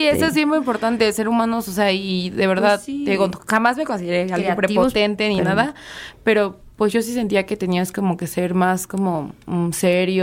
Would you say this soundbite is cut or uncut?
uncut